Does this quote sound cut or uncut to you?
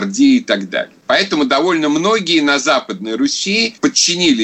uncut